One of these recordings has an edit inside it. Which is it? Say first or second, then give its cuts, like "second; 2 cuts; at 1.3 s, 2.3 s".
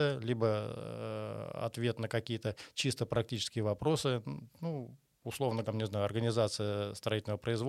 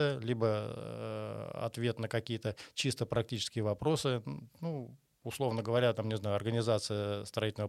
first; 1 cut; at 5.6 s